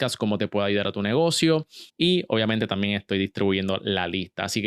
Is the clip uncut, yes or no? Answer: no